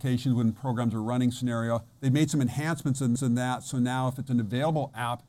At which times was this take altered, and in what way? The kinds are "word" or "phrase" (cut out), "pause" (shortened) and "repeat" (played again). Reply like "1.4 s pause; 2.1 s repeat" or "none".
3.2 s repeat